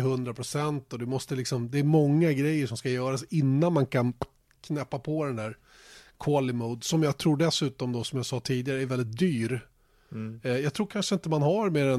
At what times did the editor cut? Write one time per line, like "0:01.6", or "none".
0:08.9